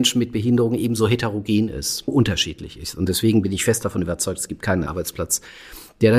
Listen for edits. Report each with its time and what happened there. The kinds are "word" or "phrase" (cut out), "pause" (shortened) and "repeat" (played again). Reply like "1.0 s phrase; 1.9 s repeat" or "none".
2.1 s word; 4.9 s word

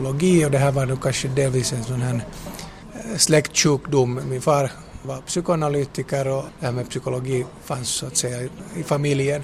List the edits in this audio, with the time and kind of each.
none

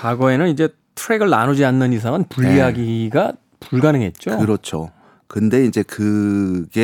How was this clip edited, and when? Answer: none

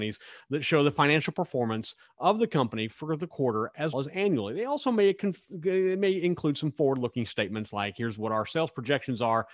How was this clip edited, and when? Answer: 3.9 s word

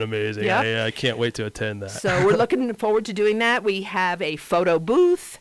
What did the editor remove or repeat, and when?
none

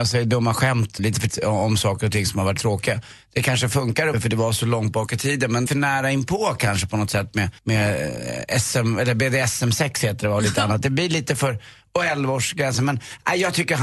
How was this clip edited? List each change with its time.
1.0 s word; 1.3 s word; 2.6 s word; 4.1 s phrase; 5.7 s phrase; 7.6 s pause

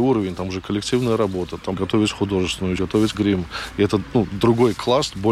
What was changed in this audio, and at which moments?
1.7 s word; 2.8 s word; 3.1 s phrase

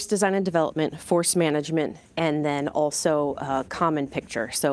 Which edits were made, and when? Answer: none

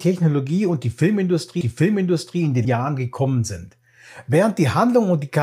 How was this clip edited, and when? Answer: 1.6 s repeat; 2.6 s word

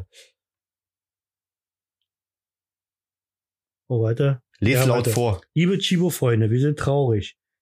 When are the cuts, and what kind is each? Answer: 4.5 s pause

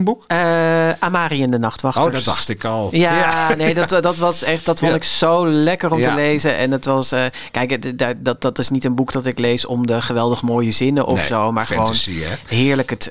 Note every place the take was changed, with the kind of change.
none

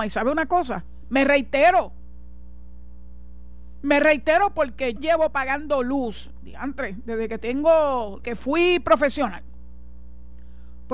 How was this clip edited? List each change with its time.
5.0 s word; 8.2 s word

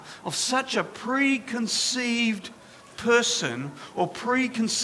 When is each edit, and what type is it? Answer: none

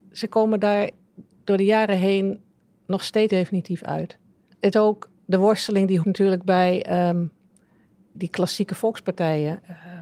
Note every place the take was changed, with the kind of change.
3.3 s word; 4.7 s word; 6.0 s word; 8.1 s word

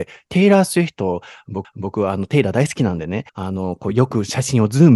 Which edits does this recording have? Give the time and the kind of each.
1.6 s repeat; 3.3 s pause

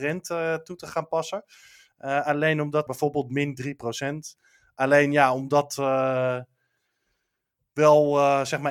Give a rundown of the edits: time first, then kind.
2.9 s word

